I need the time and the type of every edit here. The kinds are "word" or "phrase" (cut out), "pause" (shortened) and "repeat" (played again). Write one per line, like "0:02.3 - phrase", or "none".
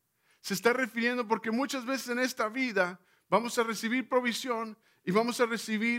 none